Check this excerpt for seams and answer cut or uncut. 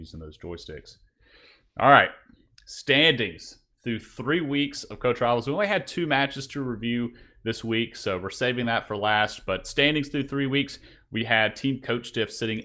uncut